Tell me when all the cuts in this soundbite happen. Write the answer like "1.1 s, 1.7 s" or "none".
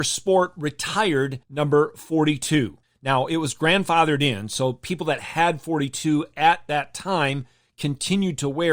1.4 s, 2.8 s